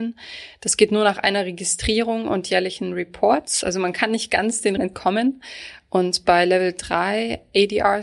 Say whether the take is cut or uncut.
cut